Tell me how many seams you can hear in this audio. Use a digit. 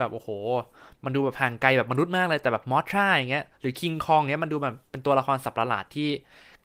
1